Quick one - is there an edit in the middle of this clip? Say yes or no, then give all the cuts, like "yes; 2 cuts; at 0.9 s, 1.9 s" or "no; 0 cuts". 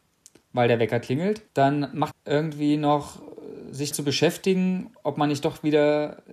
yes; 3 cuts; at 1.5 s, 2.1 s, 3.9 s